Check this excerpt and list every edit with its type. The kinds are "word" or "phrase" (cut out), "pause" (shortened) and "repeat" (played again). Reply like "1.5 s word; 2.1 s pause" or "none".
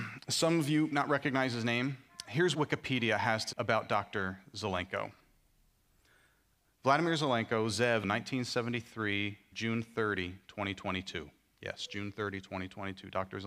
0.9 s word; 2.5 s word; 3.5 s word; 8.0 s word; 9.5 s word